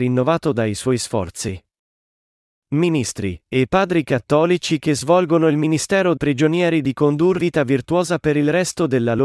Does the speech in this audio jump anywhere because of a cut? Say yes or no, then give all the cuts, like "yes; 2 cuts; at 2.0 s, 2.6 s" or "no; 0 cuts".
yes; 3 cuts; at 3.4 s, 6.2 s, 7.4 s